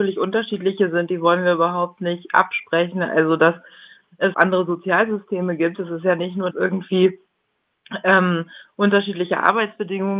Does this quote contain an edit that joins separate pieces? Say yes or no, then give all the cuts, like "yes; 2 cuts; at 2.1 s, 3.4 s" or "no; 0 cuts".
yes; 2 cuts; at 4.3 s, 6.5 s